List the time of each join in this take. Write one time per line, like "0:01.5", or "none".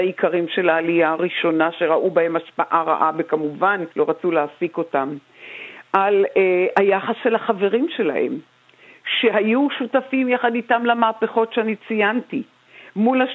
0:03.9